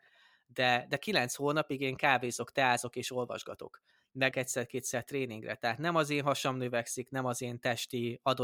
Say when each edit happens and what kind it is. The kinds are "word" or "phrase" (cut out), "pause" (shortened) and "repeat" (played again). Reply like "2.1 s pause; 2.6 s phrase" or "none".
4.3 s word